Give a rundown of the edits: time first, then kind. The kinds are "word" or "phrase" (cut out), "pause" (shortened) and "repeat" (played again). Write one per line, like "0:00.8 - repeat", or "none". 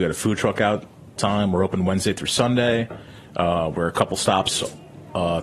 0:01.2 - word